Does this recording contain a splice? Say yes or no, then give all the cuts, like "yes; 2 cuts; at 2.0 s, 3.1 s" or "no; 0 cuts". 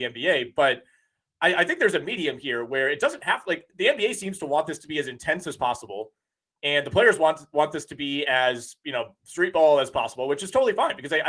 yes; 1 cut; at 9.2 s